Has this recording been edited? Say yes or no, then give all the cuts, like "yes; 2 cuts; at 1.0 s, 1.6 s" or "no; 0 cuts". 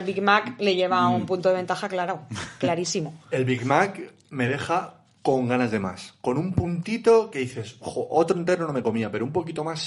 no; 0 cuts